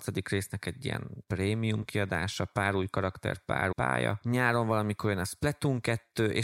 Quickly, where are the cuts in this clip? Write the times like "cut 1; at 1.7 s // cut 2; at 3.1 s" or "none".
cut 1; at 3.7 s